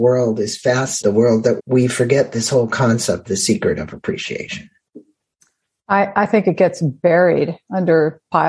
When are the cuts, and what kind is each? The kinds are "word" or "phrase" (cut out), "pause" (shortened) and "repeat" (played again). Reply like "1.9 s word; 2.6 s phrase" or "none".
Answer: 1.0 s phrase; 1.6 s phrase; 3.3 s word